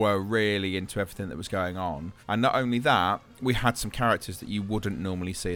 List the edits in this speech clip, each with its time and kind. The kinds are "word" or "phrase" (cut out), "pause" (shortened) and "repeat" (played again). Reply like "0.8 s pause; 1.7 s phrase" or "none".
2.2 s pause